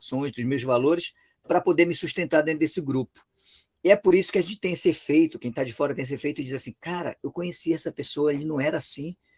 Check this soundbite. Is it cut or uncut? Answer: uncut